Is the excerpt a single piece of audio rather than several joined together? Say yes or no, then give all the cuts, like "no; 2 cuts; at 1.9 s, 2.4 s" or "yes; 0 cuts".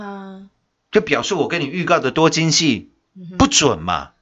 yes; 0 cuts